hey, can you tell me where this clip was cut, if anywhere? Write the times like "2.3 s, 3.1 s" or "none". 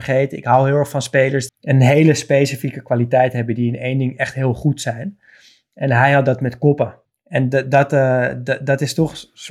1.5 s, 7.1 s